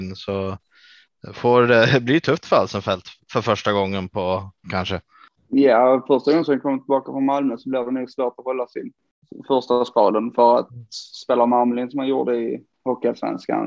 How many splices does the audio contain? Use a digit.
1